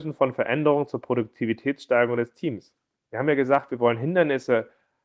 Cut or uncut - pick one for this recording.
uncut